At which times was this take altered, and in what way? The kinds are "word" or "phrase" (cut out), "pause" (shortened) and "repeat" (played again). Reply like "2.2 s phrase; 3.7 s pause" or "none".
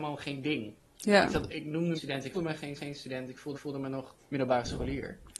1.5 s word; 1.9 s phrase; 2.3 s word; 2.8 s repeat; 3.5 s repeat; 4.2 s pause